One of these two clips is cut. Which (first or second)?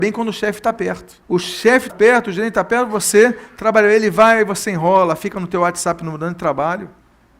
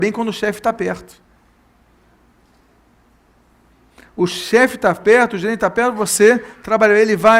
first